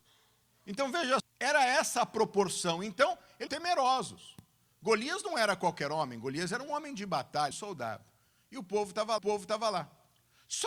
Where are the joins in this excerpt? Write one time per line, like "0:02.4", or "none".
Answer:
0:01.2
0:03.5
0:07.5
0:09.2